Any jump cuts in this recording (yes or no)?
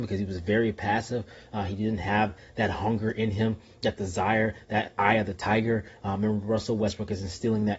no